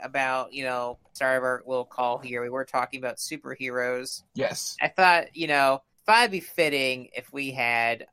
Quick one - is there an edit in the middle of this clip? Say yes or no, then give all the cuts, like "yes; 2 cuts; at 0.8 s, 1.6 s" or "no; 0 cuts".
yes; 2 cuts; at 1.1 s, 5.9 s